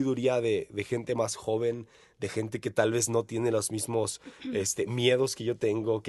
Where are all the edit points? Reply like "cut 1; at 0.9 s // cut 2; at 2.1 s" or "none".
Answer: none

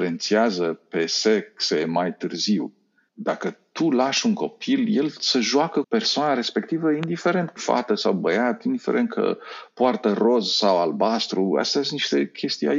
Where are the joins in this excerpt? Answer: cut 1; at 3.1 s // cut 2; at 5.8 s // cut 3; at 7.6 s

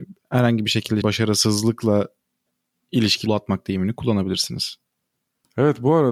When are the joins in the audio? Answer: cut 1; at 1.0 s // cut 2; at 3.3 s

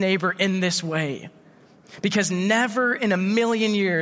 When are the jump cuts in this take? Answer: none

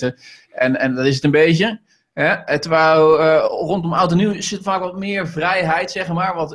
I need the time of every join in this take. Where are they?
none

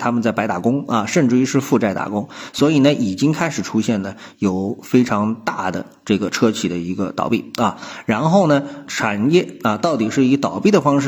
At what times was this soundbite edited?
cut 1; at 8.9 s

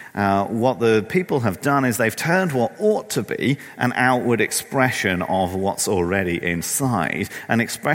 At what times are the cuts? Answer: none

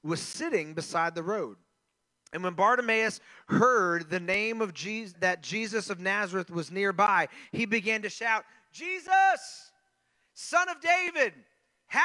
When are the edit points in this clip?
cut 1; at 5.1 s

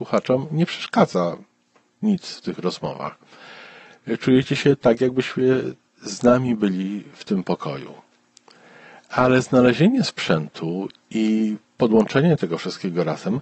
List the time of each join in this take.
none

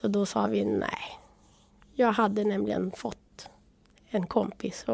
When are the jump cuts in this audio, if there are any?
none

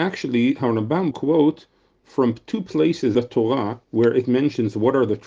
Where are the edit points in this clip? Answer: cut 1; at 1.1 s // cut 2; at 3.1 s // cut 3; at 3.8 s

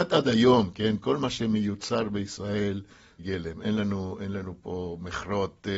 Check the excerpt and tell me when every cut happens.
cut 1; at 3.2 s

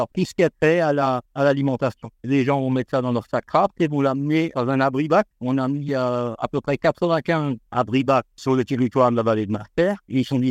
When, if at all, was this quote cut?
cut 1; at 1.2 s

